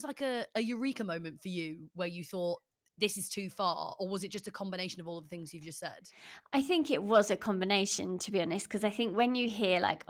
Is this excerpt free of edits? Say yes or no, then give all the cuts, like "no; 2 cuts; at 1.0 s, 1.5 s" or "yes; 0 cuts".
yes; 0 cuts